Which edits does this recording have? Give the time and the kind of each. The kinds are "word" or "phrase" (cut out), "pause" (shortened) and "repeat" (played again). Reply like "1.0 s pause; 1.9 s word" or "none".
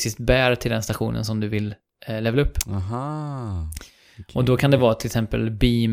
none